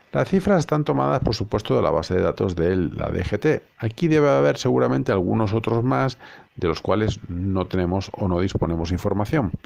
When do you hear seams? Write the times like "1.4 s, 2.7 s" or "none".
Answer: none

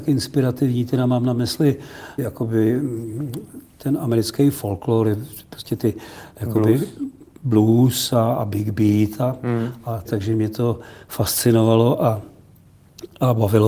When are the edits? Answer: 2.2 s, 10.0 s

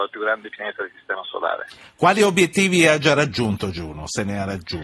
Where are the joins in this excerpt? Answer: none

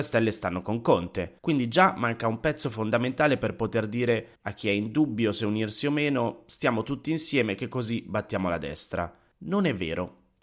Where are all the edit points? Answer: 1.4 s, 4.4 s, 9.3 s

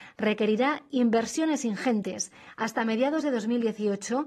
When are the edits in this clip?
none

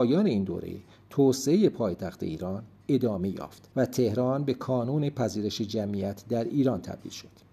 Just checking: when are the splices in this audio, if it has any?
3.7 s

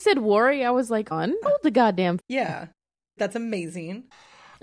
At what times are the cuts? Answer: 1.1 s, 1.4 s, 2.2 s, 3.2 s

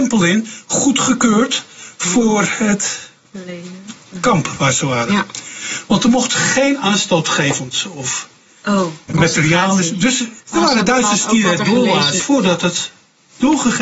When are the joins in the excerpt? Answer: 9.1 s, 10.4 s, 12.2 s

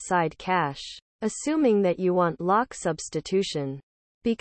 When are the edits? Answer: 1.1 s

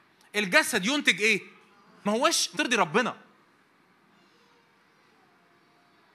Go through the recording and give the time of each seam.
2.1 s, 2.6 s

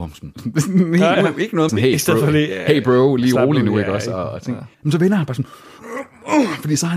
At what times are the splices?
1.1 s, 1.7 s, 4.7 s

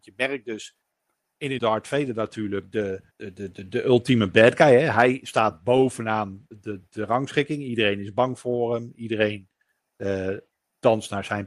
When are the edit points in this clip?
1.6 s, 3.1 s

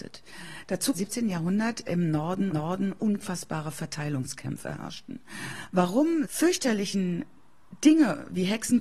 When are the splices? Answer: 0.9 s, 2.5 s, 6.2 s

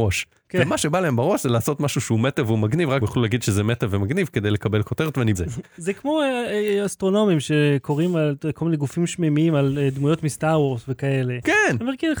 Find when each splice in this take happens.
3.0 s, 5.3 s

